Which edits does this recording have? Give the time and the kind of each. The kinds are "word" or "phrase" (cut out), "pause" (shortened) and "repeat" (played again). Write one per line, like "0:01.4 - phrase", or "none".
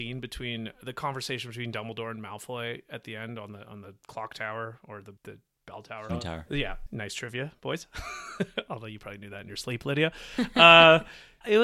0:05.2 - pause
0:06.1 - word
0:07.6 - pause